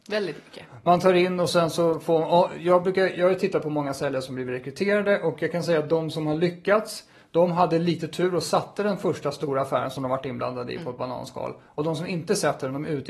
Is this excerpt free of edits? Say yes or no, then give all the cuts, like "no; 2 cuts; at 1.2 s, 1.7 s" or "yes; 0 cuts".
yes; 0 cuts